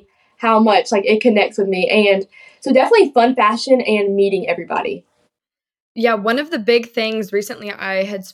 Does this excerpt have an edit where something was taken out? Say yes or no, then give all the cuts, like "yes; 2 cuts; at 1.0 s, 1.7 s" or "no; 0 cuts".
no; 0 cuts